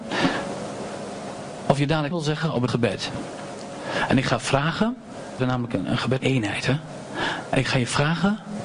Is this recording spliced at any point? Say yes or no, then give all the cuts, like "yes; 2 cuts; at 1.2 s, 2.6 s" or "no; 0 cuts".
yes; 4 cuts; at 2.1 s, 2.7 s, 5.4 s, 6.2 s